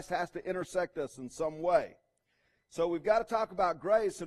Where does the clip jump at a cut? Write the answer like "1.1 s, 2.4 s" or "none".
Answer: none